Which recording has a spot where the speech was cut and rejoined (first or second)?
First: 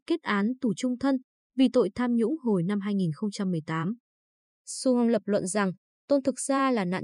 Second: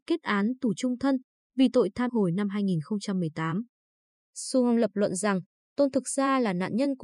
second